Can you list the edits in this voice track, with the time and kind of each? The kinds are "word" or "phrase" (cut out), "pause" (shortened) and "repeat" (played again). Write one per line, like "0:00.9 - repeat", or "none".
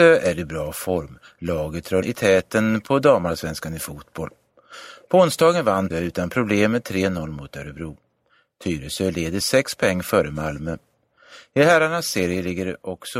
0:02.0 - word
0:05.9 - word
0:09.4 - word